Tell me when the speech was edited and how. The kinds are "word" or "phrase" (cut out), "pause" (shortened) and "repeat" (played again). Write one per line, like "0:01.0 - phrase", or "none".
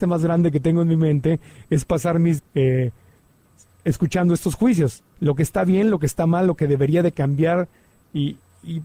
0:02.4 - word
0:05.1 - pause